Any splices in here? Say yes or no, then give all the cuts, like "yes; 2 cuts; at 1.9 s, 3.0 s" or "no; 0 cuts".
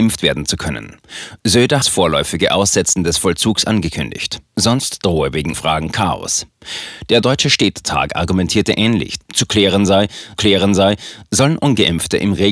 yes; 3 cuts; at 1.8 s, 5.5 s, 10.4 s